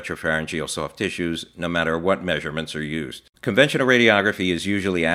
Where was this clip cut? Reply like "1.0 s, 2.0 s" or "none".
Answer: 3.4 s